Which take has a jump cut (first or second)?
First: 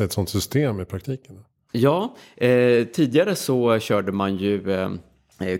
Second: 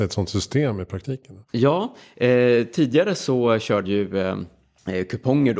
second